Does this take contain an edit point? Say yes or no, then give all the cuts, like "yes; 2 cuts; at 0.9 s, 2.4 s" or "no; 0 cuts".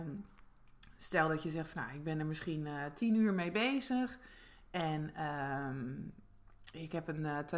no; 0 cuts